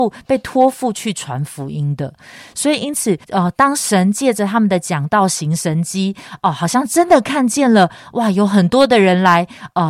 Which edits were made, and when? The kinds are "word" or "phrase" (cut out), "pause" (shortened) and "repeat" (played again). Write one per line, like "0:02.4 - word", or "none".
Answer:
0:03.2 - pause